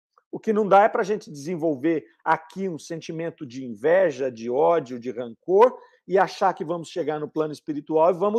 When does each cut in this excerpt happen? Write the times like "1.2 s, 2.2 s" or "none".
none